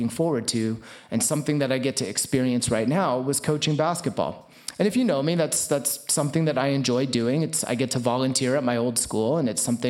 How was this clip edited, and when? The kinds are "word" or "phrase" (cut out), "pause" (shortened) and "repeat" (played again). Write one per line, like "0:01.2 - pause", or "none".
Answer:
none